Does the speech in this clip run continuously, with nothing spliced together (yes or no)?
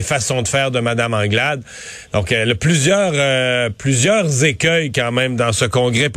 yes